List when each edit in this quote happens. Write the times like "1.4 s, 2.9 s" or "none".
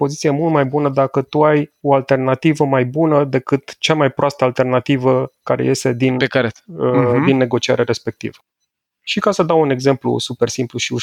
none